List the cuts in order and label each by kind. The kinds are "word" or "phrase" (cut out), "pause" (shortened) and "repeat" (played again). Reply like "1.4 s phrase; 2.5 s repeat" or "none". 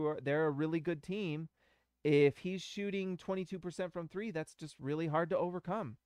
none